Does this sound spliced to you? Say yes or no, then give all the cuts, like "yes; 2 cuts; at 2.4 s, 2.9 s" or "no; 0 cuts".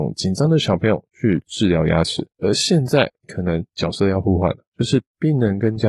yes; 4 cuts; at 2.3 s, 3.2 s, 3.7 s, 4.7 s